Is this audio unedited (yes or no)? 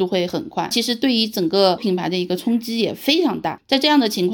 no